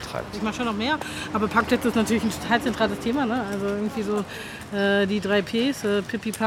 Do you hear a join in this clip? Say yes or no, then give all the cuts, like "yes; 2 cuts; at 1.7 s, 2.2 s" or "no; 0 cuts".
no; 0 cuts